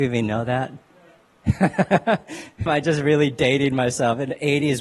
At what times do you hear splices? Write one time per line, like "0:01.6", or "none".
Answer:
0:02.7